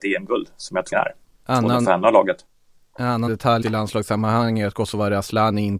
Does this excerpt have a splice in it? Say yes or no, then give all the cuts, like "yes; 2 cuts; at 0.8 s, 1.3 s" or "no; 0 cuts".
yes; 3 cuts; at 0.9 s, 3.3 s, 3.6 s